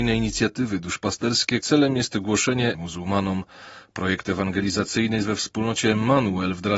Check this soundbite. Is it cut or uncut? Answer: cut